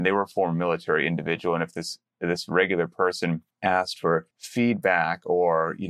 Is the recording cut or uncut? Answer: cut